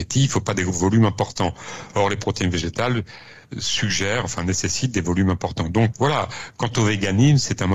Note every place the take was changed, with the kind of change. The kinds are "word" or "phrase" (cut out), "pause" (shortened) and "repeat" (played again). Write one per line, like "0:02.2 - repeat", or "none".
0:05.9 - word